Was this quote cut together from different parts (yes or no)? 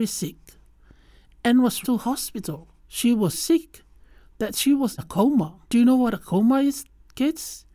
yes